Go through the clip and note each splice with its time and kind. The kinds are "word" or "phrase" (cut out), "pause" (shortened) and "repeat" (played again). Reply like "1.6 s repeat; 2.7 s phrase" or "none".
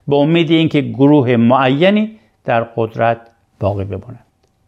none